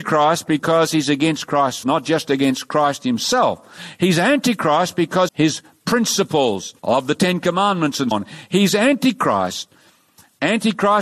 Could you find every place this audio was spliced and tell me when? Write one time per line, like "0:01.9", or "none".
0:01.8
0:05.3
0:06.8
0:08.1